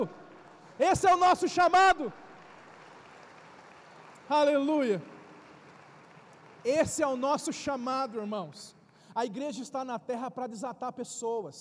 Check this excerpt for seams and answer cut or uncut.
uncut